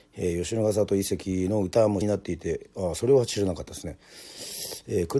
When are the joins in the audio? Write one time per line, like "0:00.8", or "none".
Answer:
0:02.0